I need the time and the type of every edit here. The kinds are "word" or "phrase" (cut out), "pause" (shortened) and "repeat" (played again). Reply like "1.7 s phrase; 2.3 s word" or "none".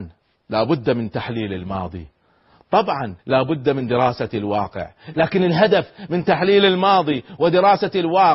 3.2 s pause